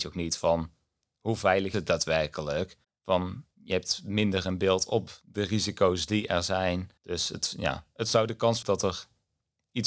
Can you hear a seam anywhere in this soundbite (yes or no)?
yes